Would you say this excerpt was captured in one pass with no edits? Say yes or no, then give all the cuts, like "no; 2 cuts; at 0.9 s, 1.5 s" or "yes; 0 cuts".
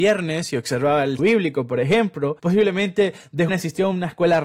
no; 3 cuts; at 1.2 s, 2.4 s, 3.5 s